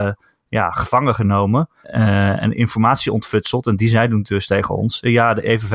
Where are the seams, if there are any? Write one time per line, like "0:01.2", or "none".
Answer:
none

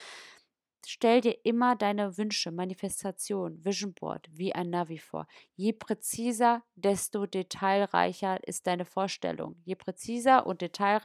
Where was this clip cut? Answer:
none

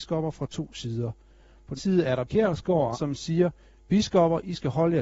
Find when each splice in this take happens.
0:01.8
0:02.3
0:02.9

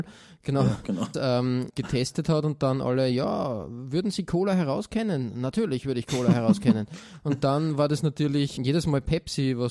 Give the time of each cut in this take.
0:01.1
0:01.7
0:08.6

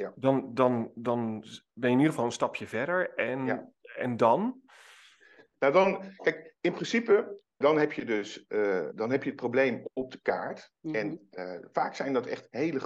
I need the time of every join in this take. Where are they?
0:07.6
0:08.9
0:10.8

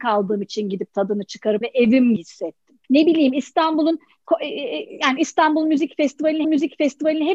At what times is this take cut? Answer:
0:01.6
0:02.2
0:02.8
0:06.4

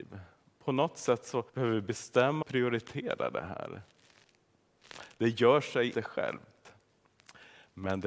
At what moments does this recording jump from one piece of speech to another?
0:01.5
0:02.4
0:05.9

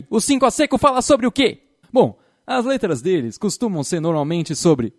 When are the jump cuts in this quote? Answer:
none

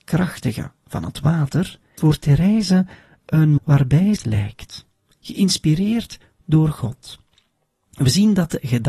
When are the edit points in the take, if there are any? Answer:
0:02.0
0:03.6
0:04.2

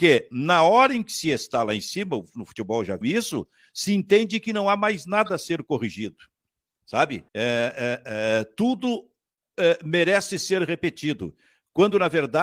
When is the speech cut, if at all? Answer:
0:03.0
0:07.3

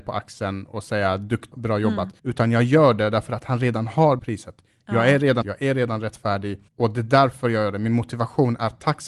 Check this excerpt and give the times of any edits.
0:01.5
0:02.2
0:04.2
0:05.4
0:06.7

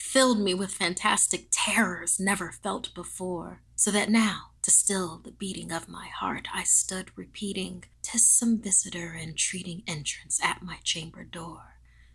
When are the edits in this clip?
0:03.7
0:04.6
0:07.9

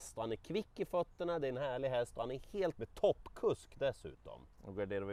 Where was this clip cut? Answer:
0:02.7

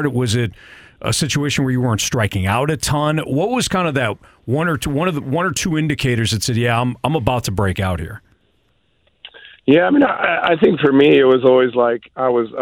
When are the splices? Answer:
none

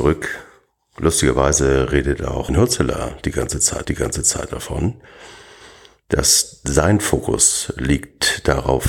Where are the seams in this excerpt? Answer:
0:02.5
0:03.8

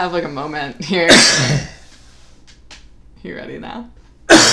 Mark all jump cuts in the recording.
none

